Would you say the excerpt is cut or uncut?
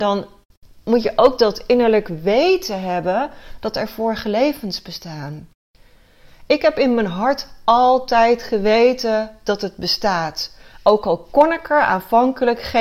uncut